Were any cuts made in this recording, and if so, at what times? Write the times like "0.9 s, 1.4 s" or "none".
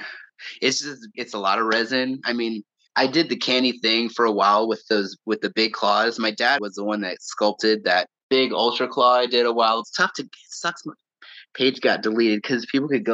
1.1 s, 2.9 s, 6.6 s, 8.2 s, 9.8 s